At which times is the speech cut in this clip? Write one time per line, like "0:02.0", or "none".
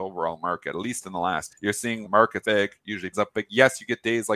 0:01.5
0:02.0
0:02.4
0:03.1